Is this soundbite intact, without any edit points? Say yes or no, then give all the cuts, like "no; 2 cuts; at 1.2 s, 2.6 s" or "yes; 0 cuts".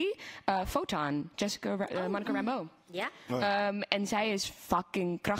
yes; 0 cuts